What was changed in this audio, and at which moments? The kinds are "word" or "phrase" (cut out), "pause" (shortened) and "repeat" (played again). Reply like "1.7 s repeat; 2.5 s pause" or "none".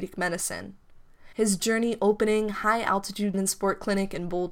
1.3 s pause; 3.3 s word